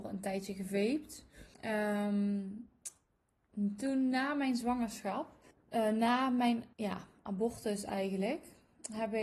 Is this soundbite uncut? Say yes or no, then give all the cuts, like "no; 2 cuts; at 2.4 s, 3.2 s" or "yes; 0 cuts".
no; 3 cuts; at 1.5 s, 5.5 s, 6.7 s